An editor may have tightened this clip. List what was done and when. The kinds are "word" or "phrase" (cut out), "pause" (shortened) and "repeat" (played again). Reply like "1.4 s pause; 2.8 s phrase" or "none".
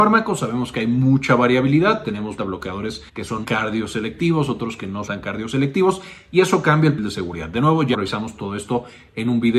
2.4 s word; 3.1 s pause; 3.4 s word; 5.1 s word; 7.0 s word; 7.9 s word